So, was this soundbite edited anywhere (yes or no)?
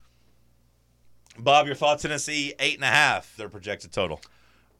yes